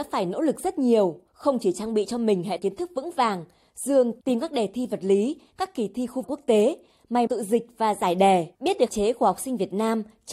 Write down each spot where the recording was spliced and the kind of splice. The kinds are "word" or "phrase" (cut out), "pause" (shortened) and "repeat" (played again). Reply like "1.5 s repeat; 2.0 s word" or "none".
1.3 s pause; 2.6 s word; 4.2 s phrase; 6.2 s phrase; 7.3 s word; 8.5 s pause; 8.9 s word